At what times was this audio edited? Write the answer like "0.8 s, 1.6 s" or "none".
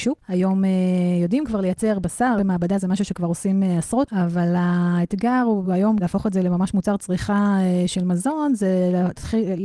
2.4 s, 4.1 s, 5.6 s, 6.0 s